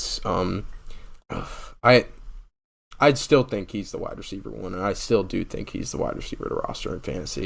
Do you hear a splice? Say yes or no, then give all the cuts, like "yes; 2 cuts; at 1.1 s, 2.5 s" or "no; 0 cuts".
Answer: yes; 1 cut; at 1.2 s